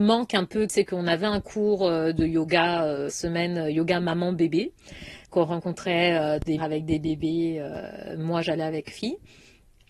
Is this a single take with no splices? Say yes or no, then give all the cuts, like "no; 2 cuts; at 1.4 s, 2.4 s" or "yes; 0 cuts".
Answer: no; 3 cuts; at 3.1 s, 6.6 s, 8.9 s